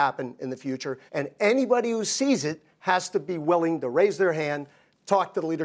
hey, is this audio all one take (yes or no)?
no